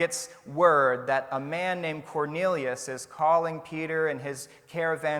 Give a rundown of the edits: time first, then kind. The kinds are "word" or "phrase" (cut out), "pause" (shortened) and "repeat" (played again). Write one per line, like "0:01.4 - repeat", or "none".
none